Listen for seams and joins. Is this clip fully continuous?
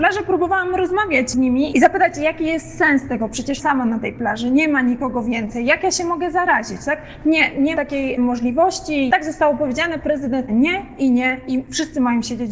no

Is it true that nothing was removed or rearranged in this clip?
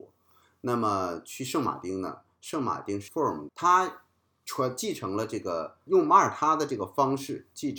no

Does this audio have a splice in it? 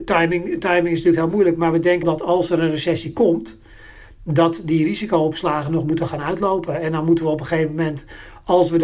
yes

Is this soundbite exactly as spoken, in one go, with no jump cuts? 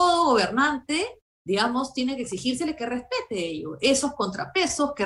yes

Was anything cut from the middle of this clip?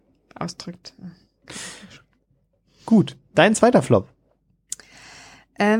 no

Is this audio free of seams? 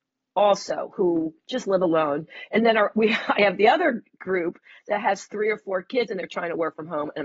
yes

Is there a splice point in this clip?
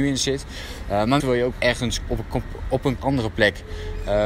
yes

